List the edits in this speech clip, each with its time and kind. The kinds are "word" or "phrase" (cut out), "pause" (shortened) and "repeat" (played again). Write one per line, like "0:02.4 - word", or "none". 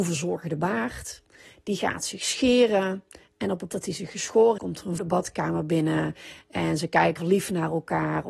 0:03.7 - word
0:04.6 - word
0:05.0 - word
0:07.2 - word